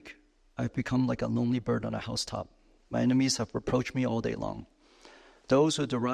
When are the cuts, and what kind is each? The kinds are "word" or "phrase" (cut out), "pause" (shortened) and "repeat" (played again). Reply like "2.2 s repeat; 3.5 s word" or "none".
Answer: none

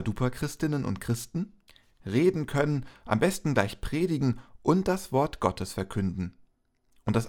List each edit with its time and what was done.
1.7 s pause

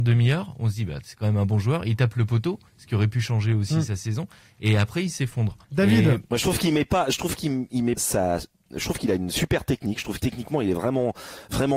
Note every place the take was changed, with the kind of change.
2.7 s pause; 5.6 s pause; 8.0 s word; 10.2 s word

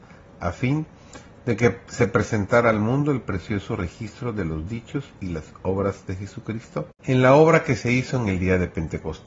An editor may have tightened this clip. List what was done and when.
none

